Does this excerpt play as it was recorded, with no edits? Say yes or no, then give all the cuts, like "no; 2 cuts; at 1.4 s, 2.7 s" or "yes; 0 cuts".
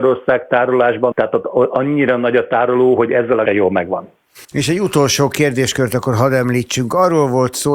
no; 3 cuts; at 1.1 s, 3.5 s, 4.4 s